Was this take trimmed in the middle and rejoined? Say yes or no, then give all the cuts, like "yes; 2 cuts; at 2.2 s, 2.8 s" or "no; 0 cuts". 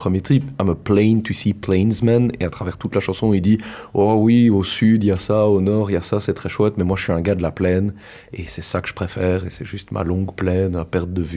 no; 0 cuts